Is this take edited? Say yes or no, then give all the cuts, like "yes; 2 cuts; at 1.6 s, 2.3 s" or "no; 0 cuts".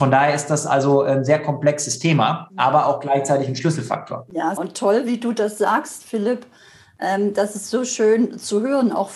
yes; 1 cut; at 4.6 s